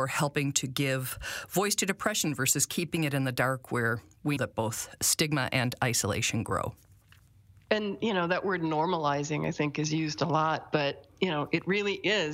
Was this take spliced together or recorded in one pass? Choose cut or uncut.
cut